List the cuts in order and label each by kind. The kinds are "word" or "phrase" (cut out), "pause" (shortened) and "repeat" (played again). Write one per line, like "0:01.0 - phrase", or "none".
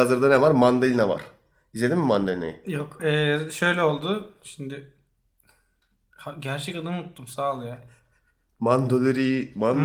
0:03.0 - word